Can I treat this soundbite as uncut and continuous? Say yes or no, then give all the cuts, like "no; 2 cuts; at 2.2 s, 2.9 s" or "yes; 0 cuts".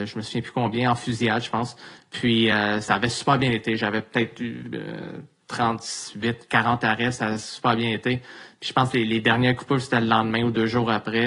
yes; 0 cuts